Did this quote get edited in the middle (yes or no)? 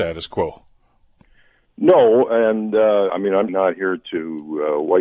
yes